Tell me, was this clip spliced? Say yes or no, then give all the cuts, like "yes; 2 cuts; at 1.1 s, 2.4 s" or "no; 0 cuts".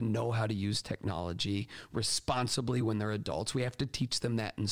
no; 0 cuts